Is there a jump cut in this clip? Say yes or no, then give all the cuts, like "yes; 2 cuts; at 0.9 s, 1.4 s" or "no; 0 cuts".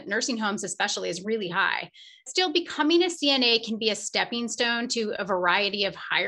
no; 0 cuts